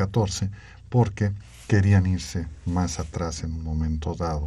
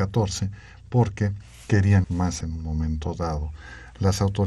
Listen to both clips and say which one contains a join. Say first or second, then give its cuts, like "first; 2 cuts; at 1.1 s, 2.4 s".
second; 2 cuts; at 2.0 s, 2.4 s